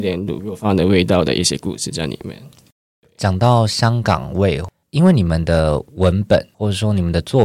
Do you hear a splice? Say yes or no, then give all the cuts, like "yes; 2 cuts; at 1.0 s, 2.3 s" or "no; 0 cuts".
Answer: no; 0 cuts